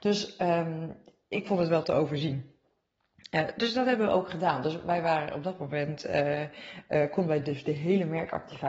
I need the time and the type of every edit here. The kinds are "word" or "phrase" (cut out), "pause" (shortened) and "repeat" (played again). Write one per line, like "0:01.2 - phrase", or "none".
none